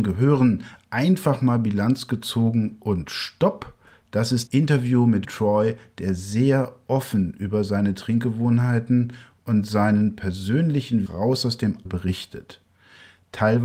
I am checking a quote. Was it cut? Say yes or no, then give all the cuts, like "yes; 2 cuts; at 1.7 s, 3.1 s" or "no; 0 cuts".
yes; 4 cuts; at 4.5 s, 5.2 s, 11.1 s, 11.9 s